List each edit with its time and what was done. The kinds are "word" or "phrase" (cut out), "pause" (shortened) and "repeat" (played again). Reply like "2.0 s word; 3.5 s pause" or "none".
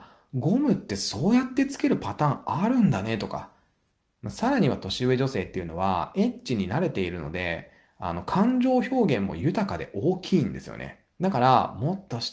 11.1 s pause